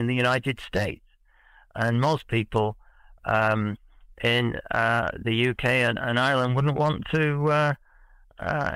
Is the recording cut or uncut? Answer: uncut